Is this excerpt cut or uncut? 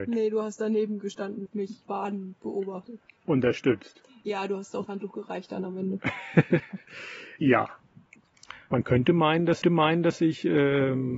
cut